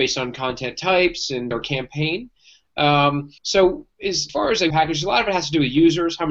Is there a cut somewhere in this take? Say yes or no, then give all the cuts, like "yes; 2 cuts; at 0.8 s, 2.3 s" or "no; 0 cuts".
yes; 4 cuts; at 1.5 s, 3.4 s, 4.3 s, 4.7 s